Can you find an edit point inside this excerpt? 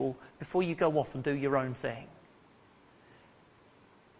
no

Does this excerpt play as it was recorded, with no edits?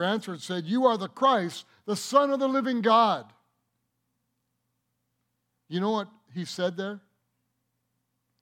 yes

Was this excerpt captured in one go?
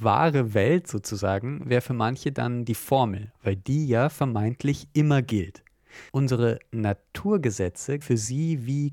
no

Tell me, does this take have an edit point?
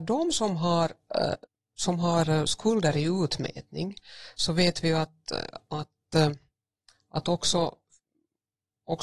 yes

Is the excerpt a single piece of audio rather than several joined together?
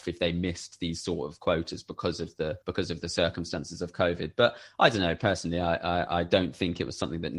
no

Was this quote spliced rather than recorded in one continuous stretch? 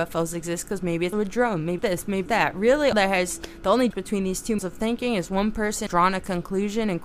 yes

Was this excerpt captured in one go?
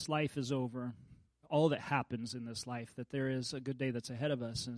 no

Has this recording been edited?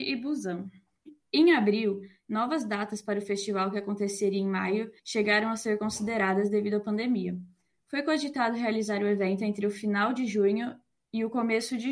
yes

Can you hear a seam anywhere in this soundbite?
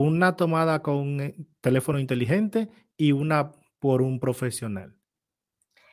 no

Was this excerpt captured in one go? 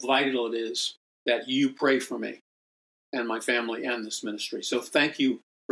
yes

